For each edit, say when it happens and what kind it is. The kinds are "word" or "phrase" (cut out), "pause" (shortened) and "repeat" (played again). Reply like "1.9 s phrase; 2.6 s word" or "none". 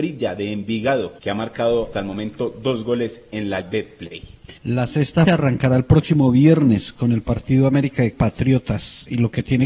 1.2 s pause; 1.9 s word; 3.6 s word; 4.6 s pause; 5.3 s word; 8.1 s word